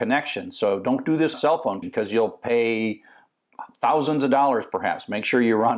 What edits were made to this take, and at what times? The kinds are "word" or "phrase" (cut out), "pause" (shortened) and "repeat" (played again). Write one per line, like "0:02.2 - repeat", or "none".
0:01.3 - phrase
0:01.8 - word